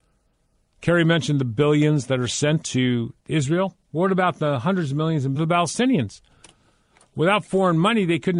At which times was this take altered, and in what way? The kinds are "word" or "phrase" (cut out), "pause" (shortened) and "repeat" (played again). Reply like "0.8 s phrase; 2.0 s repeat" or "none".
3.2 s pause; 5.4 s phrase